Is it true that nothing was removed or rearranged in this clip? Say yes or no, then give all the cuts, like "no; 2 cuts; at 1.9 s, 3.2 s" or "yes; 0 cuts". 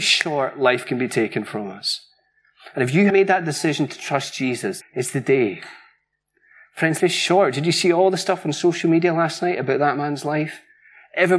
no; 4 cuts; at 3.1 s, 3.9 s, 4.8 s, 7.0 s